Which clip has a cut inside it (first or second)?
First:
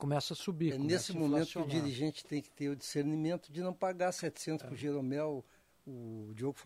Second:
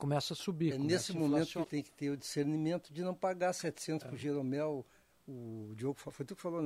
second